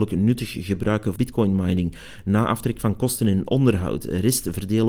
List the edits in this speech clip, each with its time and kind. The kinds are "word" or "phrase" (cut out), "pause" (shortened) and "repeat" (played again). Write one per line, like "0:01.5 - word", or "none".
0:01.2 - word